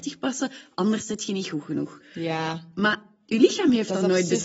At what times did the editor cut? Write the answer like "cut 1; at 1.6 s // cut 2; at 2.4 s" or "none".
none